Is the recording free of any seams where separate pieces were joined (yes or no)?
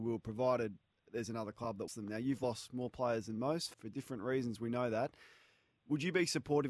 no